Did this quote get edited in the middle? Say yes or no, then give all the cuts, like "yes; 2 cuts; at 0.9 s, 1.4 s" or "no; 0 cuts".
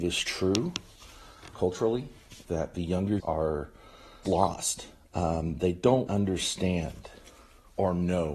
yes; 5 cuts; at 1.5 s, 2.5 s, 3.2 s, 4.3 s, 6.1 s